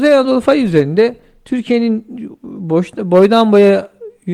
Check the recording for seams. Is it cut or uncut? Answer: uncut